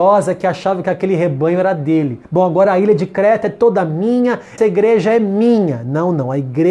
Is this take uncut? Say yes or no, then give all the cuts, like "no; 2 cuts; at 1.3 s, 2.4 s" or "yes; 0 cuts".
no; 2 cuts; at 2.2 s, 4.6 s